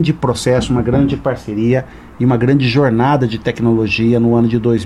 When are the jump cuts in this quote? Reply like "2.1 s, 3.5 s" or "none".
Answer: none